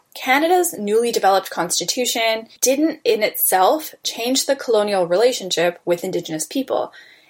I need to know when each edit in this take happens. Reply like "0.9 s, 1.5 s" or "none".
none